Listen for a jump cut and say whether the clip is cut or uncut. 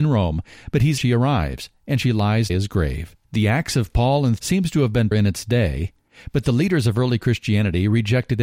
cut